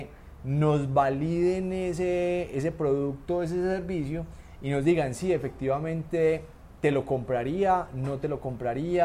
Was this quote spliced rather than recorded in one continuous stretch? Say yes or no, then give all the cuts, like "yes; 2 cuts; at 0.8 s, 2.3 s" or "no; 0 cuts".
no; 0 cuts